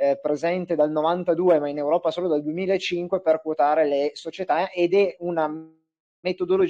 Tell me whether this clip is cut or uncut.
uncut